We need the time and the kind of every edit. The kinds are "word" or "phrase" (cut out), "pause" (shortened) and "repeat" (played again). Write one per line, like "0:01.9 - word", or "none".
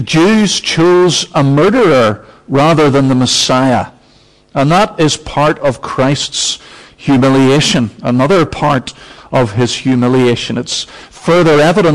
none